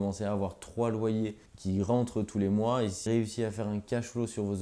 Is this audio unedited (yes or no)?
no